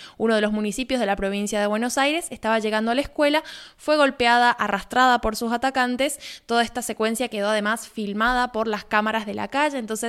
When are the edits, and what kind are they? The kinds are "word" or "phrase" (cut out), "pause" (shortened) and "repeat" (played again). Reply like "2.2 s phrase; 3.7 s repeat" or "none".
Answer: none